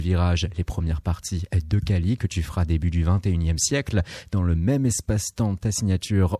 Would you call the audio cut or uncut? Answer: uncut